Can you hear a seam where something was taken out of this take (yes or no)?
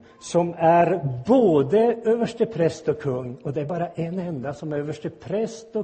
no